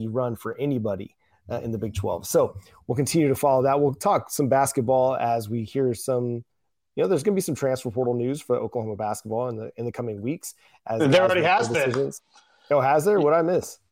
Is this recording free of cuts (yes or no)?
yes